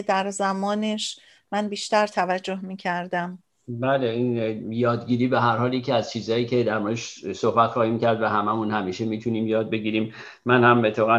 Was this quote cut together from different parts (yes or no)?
no